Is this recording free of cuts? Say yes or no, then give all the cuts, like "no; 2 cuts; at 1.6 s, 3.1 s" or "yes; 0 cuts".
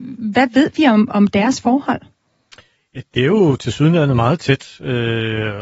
no; 1 cut; at 2.8 s